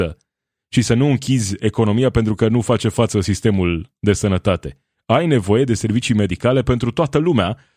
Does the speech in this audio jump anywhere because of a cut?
no; 0 cuts

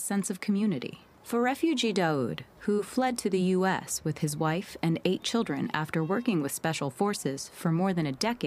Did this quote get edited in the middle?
yes; 1 cut; at 1.1 s

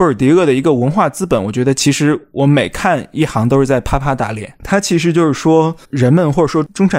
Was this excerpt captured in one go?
no; 1 cut; at 5.8 s

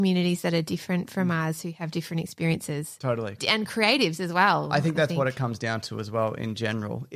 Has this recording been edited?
no; 0 cuts

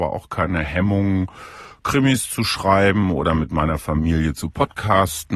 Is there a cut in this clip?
no; 0 cuts

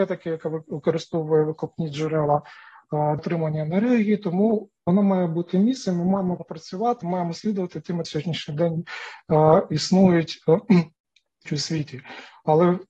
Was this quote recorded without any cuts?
no; 5 cuts; at 3.2 s, 4.8 s, 7.0 s, 8.0 s, 11.5 s

